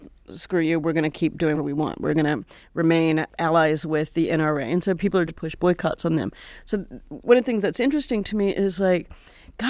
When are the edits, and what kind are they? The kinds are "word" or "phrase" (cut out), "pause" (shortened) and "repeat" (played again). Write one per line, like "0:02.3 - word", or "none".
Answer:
0:01.5 - word
0:05.3 - word